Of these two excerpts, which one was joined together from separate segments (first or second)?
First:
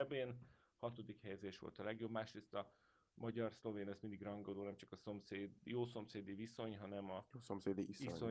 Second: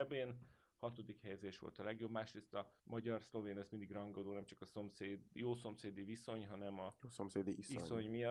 second